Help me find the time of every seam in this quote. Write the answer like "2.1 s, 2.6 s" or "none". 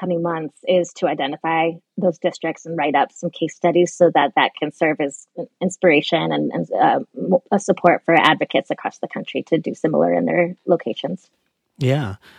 7.5 s